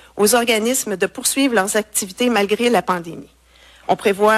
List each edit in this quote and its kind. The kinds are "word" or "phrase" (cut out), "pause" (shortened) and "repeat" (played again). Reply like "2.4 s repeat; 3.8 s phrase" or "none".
none